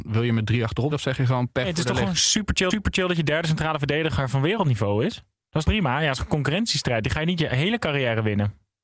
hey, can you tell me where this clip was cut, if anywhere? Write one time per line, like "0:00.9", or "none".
0:00.9
0:02.7
0:05.3
0:05.6